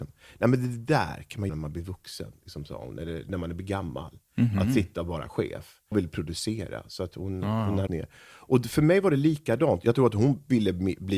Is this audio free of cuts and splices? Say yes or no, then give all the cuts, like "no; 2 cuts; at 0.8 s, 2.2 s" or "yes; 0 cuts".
no; 3 cuts; at 1.5 s, 5.9 s, 7.9 s